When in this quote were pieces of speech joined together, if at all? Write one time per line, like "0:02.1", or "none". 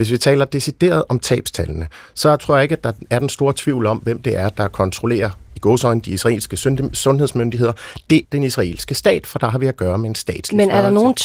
0:08.2